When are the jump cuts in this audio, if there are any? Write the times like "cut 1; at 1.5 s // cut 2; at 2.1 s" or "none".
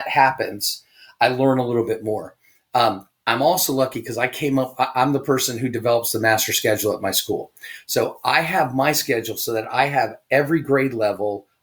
none